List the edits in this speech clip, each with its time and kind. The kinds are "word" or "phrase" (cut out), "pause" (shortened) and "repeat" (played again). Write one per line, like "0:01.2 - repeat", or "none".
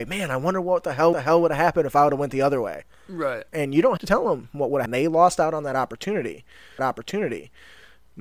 0:01.1 - repeat
0:03.5 - pause
0:04.0 - word
0:04.9 - word
0:06.8 - repeat